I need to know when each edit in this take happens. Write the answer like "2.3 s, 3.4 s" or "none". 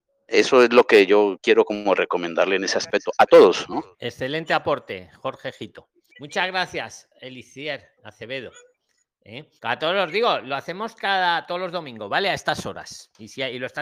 3.9 s, 6.1 s, 8.0 s, 9.6 s